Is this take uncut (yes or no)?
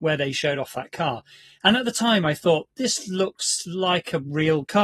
yes